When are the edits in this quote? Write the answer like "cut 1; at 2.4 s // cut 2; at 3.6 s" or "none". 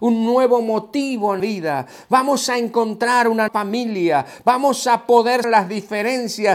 cut 1; at 1.4 s // cut 2; at 3.5 s // cut 3; at 5.4 s